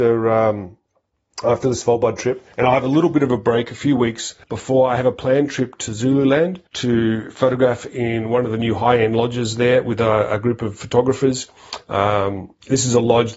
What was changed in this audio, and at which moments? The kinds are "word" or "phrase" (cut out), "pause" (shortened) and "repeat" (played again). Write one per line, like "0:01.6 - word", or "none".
0:02.5 - pause
0:04.4 - pause
0:06.7 - pause